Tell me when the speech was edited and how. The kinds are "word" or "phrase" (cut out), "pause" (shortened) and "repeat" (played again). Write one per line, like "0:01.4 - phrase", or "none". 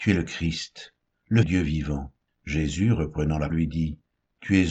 0:01.4 - phrase
0:02.3 - pause
0:03.5 - word